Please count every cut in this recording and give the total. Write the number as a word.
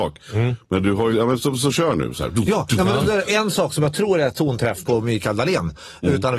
one